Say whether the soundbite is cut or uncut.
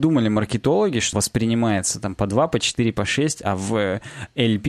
cut